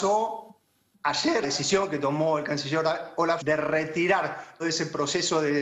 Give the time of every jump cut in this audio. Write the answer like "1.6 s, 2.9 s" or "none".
1.4 s, 3.4 s, 4.6 s

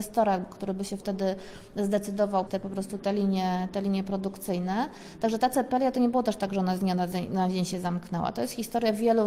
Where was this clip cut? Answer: 2.5 s

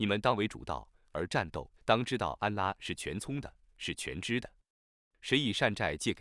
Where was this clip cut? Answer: 1.8 s

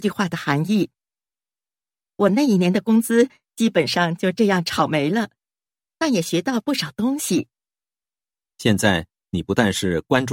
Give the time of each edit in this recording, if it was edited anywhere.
none

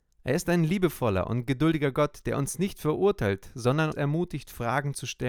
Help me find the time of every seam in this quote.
3.9 s

